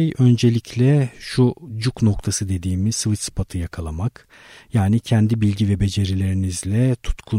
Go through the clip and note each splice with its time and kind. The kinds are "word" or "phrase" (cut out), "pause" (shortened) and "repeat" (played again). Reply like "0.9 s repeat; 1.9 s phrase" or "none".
none

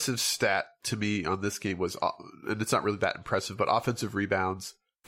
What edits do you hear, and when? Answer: none

